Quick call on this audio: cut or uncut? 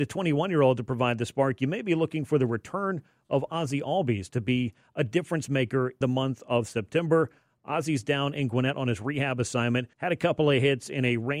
cut